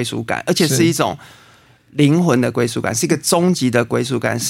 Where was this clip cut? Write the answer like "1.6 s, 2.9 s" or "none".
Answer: none